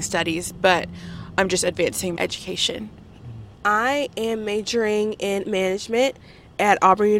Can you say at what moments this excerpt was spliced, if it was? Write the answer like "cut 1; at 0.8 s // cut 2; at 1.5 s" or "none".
cut 1; at 2.2 s // cut 2; at 5.4 s